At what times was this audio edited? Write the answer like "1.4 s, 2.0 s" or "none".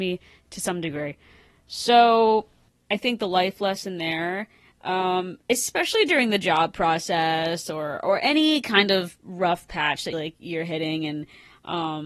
10.1 s